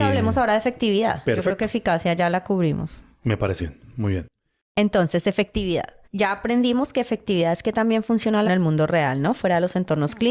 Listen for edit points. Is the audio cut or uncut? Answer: cut